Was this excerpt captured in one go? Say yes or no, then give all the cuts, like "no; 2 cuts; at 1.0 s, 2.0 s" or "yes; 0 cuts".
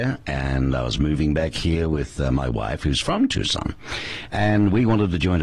yes; 0 cuts